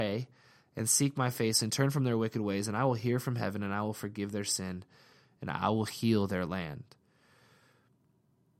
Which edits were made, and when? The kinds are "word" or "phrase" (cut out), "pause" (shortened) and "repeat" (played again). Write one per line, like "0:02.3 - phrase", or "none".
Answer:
none